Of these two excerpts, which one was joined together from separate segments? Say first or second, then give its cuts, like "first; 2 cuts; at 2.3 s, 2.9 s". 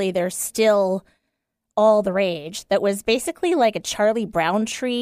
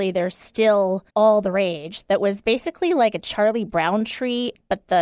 second; 1 cut; at 1.1 s